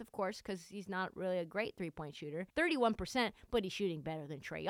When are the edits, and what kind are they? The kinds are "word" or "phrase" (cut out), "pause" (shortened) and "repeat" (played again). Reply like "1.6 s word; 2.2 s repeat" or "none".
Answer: 2.5 s pause